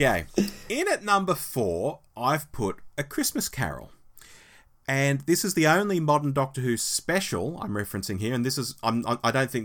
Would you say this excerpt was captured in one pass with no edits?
yes; 0 cuts

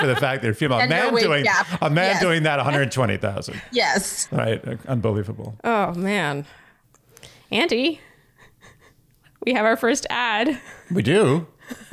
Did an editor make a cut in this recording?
no; 0 cuts

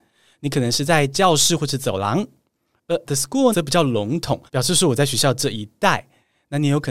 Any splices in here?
yes; 3 cuts; at 3.1 s, 3.5 s, 4.5 s

